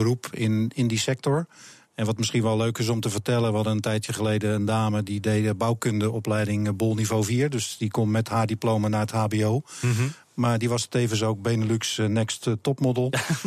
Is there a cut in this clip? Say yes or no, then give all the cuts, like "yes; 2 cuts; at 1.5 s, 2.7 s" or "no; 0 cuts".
no; 0 cuts